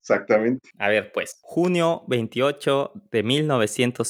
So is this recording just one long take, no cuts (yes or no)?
yes